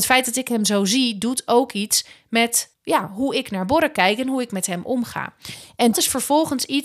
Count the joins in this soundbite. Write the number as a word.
two